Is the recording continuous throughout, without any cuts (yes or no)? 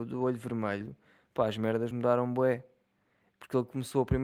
yes